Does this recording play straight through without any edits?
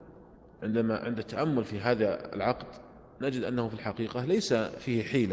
yes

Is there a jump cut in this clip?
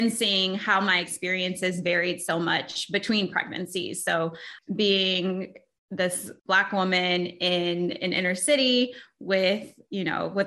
yes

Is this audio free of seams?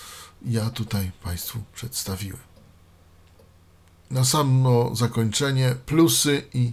yes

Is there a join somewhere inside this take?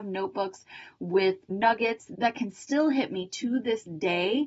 no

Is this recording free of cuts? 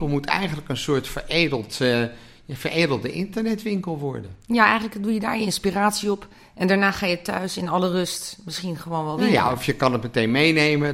yes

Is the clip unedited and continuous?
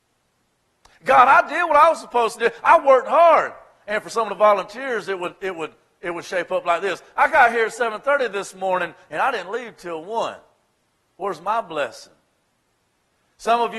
yes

